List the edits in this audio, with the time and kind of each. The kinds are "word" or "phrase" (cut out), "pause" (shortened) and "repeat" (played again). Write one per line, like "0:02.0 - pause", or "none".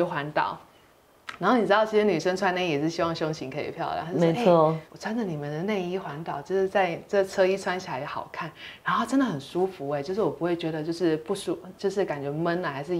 0:04.9 - pause